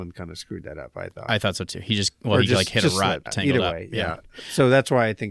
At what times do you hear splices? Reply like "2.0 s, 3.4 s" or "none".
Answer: 3.3 s

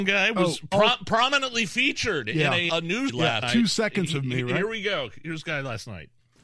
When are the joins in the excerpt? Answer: 2.7 s, 3.1 s, 3.4 s

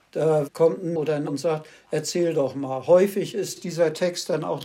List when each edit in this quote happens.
1.0 s, 1.3 s

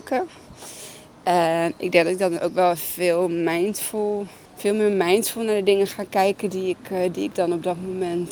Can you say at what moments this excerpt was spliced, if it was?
4.5 s

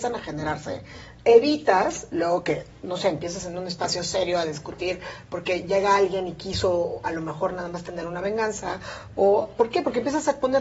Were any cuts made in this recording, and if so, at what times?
2.8 s

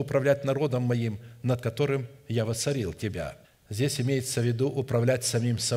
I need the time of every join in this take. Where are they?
3.4 s

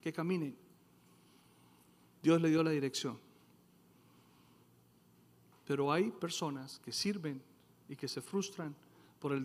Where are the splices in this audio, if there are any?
none

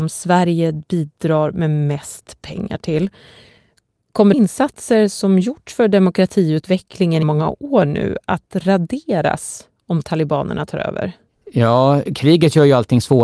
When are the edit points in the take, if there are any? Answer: 4.3 s, 7.2 s

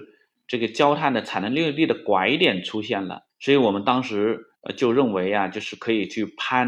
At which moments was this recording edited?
3.3 s, 4.6 s

